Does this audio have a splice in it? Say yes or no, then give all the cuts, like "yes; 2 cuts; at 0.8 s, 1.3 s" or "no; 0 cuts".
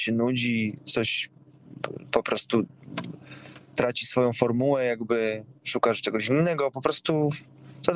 no; 0 cuts